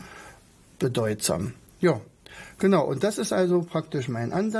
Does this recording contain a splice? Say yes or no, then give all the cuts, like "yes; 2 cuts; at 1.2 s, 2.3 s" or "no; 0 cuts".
no; 0 cuts